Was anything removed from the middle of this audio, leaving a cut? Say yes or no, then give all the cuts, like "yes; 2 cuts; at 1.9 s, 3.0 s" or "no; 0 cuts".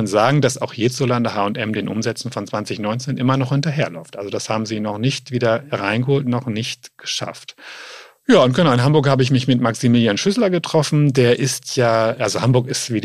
no; 0 cuts